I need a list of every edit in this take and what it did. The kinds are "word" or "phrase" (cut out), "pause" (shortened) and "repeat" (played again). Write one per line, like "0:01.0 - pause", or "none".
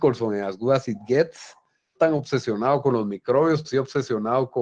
0:02.0 - word
0:03.6 - word

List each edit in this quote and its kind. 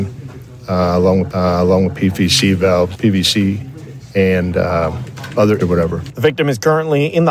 0:01.3 - repeat
0:02.9 - word
0:05.6 - word

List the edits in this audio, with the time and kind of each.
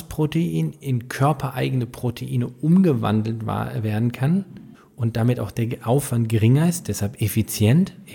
0:04.7 - pause

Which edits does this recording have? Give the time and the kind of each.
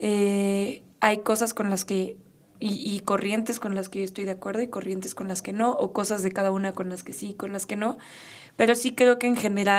0:00.9 - pause

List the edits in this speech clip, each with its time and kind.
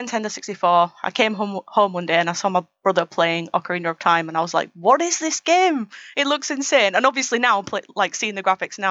none

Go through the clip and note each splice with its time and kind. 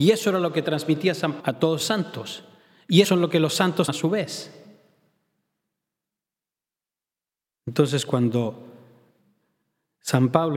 0:01.4 - word
0:01.8 - word
0:03.0 - word
0:03.9 - word

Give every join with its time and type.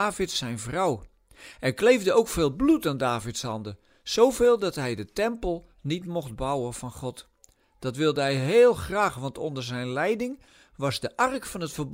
none

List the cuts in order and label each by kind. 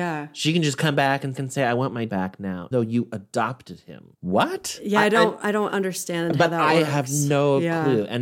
0:01.3 - repeat
0:02.1 - word
0:02.7 - word
0:04.1 - pause

